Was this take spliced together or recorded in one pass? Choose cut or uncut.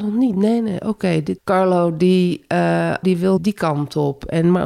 cut